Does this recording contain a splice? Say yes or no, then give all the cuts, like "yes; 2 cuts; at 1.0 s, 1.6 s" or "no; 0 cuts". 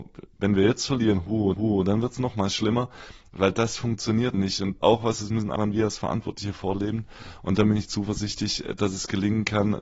yes; 4 cuts; at 1.5 s, 4.3 s, 4.8 s, 5.6 s